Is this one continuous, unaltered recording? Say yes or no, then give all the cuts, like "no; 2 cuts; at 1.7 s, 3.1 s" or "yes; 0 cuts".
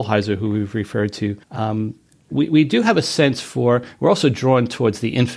no; 1 cut; at 1.4 s